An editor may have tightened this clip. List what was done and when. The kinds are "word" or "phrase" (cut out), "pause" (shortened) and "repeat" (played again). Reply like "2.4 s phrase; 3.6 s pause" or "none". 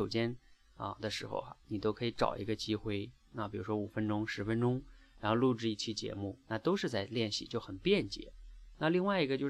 6.4 s pause